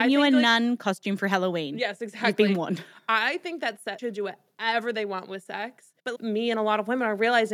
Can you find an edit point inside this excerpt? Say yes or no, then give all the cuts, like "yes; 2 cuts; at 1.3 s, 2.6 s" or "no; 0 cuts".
yes; 2 cuts; at 4.0 s, 6.0 s